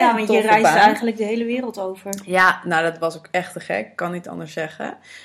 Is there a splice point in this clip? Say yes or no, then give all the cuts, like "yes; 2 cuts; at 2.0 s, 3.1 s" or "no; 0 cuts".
no; 0 cuts